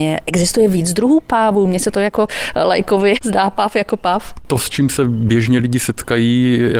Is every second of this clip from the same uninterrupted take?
yes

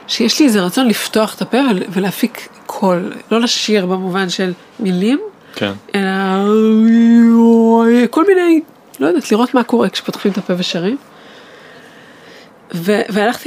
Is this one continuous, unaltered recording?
yes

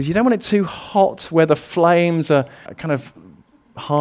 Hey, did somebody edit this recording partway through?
yes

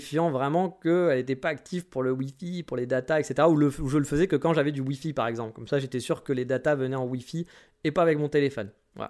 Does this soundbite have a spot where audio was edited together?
no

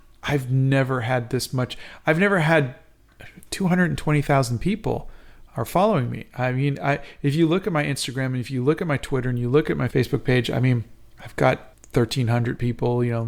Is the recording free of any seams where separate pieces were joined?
no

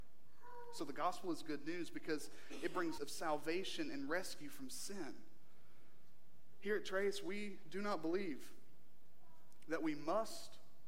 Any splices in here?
yes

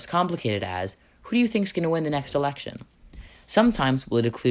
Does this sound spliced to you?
no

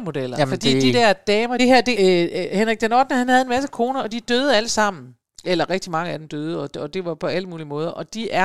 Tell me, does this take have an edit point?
yes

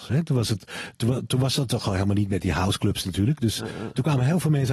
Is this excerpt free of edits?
yes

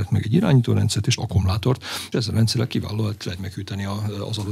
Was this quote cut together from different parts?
yes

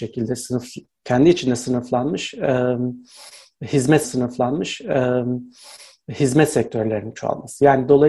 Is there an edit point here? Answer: yes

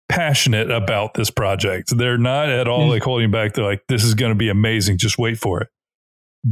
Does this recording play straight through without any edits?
yes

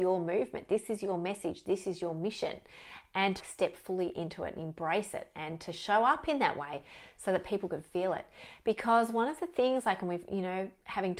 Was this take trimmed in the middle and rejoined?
yes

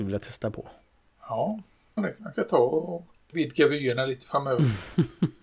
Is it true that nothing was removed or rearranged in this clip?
no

